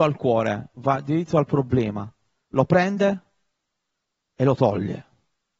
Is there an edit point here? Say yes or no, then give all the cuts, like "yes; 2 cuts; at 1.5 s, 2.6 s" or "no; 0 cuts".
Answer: no; 0 cuts